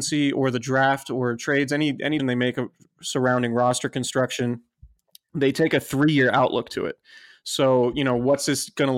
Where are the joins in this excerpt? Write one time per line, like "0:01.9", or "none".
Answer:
0:02.2